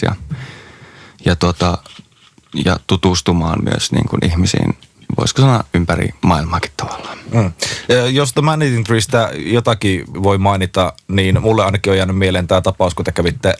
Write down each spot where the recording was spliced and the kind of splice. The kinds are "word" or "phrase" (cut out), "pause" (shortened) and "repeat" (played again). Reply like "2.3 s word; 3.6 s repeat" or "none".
10.1 s word